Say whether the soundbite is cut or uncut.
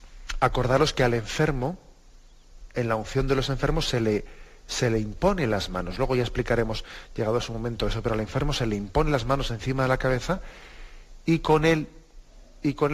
uncut